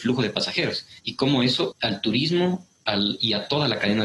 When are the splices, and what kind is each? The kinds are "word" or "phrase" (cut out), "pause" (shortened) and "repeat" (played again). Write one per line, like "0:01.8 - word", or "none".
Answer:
0:01.0 - pause
0:01.7 - word